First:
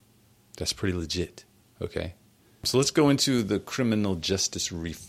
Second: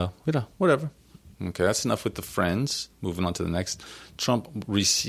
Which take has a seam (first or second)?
second